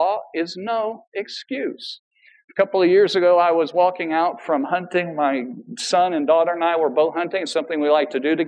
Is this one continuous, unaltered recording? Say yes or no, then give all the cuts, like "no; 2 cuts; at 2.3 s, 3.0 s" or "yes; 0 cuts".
yes; 0 cuts